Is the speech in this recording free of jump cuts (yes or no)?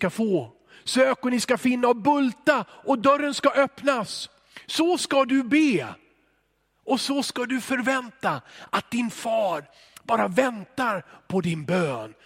yes